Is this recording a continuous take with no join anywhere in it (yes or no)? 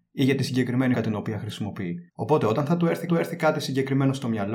no